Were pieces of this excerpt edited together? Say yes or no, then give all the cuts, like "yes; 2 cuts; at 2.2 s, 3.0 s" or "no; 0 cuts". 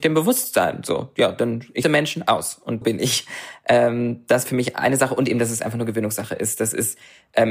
yes; 3 cuts; at 1.8 s, 2.8 s, 4.5 s